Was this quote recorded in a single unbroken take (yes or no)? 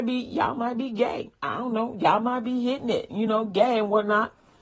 yes